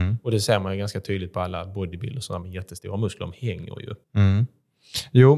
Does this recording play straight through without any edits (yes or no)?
no